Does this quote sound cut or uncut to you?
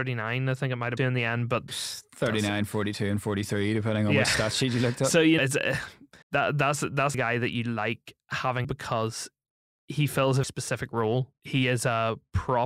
cut